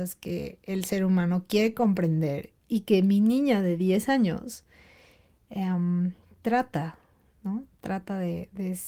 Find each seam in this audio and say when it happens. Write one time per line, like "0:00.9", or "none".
none